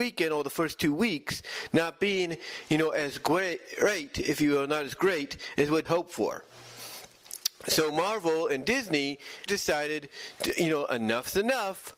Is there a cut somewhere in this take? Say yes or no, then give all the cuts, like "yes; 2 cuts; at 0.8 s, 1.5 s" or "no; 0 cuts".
yes; 2 cuts; at 5.8 s, 9.5 s